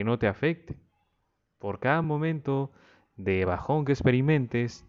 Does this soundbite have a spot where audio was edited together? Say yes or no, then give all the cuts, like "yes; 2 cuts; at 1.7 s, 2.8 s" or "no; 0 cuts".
no; 0 cuts